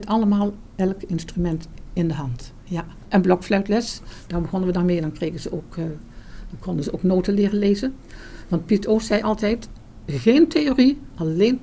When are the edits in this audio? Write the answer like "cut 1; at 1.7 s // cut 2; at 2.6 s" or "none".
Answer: none

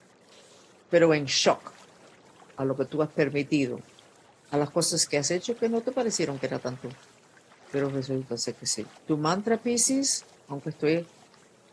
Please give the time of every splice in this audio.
cut 1; at 9.0 s

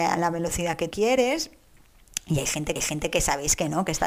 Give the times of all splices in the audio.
cut 1; at 0.9 s // cut 2; at 2.8 s

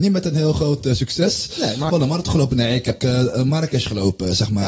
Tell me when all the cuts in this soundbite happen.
cut 1; at 1.9 s // cut 2; at 3.0 s

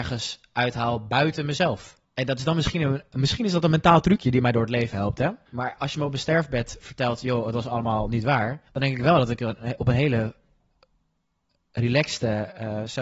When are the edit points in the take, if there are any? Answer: cut 1; at 2.0 s // cut 2; at 5.5 s // cut 3; at 8.7 s

